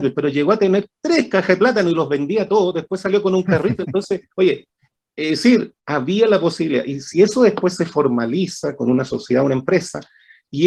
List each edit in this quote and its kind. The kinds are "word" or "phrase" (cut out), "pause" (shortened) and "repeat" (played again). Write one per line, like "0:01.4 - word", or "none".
0:04.3 - pause
0:05.8 - pause

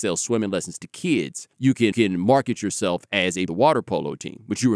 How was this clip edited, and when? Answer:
0:01.5 - pause
0:01.9 - repeat
0:03.5 - phrase

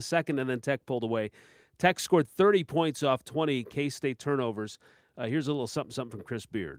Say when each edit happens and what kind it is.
none

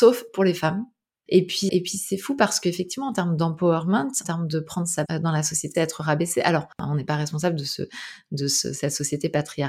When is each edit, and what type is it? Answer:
0:01.7 - word
0:04.2 - word
0:05.1 - word
0:05.7 - word

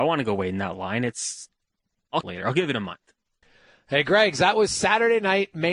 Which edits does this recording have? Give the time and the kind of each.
0:02.2 - phrase
0:03.4 - pause

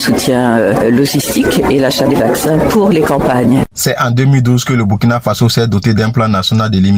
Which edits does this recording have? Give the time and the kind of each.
none

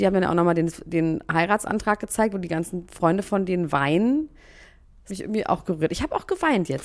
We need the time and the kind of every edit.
0:05.1 - word

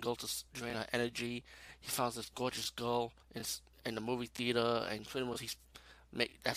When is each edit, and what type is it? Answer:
0:03.2 - pause

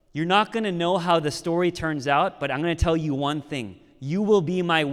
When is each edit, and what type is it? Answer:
none

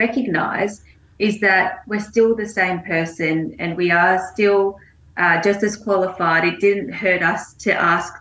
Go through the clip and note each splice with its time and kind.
none

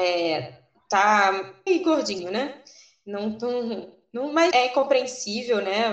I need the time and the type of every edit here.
0:01.7 - word
0:04.5 - word

